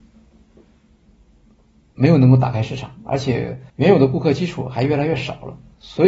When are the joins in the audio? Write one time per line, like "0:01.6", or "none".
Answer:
0:03.7